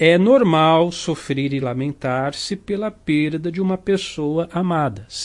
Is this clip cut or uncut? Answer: uncut